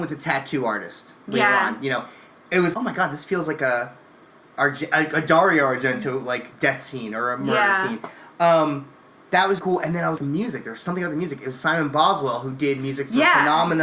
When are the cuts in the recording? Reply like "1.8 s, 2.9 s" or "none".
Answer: 2.7 s, 6.5 s, 9.6 s, 10.2 s